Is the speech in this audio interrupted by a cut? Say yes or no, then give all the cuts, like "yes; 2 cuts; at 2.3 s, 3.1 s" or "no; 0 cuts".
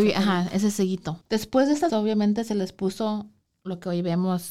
yes; 2 cuts; at 1.2 s, 1.9 s